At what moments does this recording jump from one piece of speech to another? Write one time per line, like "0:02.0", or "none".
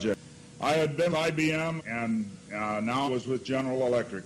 0:01.1
0:01.8
0:03.0